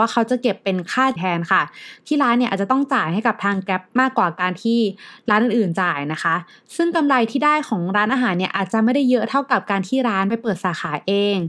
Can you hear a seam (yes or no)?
yes